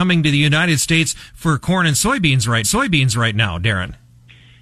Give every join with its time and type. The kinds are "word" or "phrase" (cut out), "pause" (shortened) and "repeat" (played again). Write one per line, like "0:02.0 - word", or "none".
0:02.6 - repeat